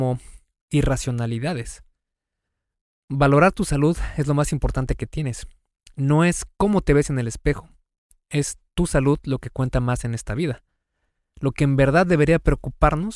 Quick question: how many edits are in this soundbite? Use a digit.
0